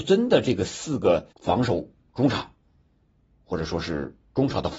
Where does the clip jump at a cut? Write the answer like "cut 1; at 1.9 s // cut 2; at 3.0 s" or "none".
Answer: cut 1; at 1.3 s